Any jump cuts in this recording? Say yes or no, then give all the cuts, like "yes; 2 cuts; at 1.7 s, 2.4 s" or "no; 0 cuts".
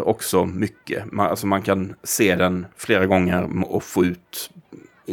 no; 0 cuts